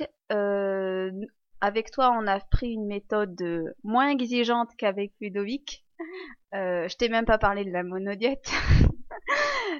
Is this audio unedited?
yes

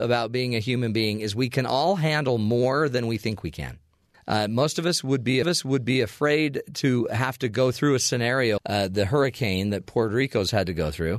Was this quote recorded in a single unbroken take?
no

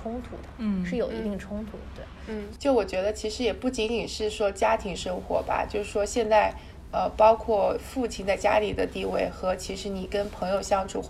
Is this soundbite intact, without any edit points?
yes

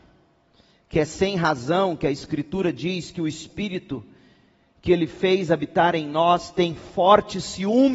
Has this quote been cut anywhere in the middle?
no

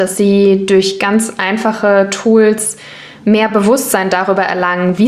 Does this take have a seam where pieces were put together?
no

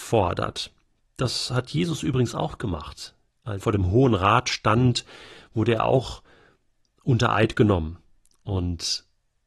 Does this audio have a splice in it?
yes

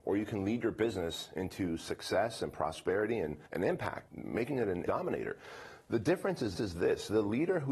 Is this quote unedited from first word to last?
no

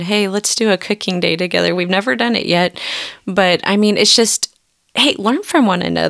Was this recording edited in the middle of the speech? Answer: no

